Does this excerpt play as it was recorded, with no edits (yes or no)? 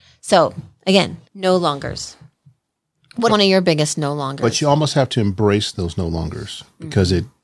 no